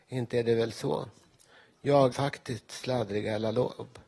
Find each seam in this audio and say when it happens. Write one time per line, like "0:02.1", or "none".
0:02.1